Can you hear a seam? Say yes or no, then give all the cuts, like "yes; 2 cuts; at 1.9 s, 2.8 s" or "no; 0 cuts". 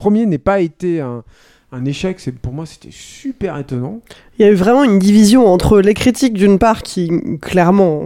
no; 0 cuts